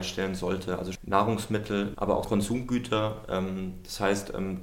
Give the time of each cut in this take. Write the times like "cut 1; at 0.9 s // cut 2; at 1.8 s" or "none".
cut 1; at 0.9 s // cut 2; at 1.9 s // cut 3; at 2.2 s